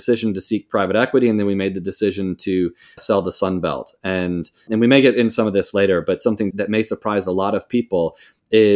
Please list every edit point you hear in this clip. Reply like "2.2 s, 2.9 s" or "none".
3.0 s, 4.7 s, 6.5 s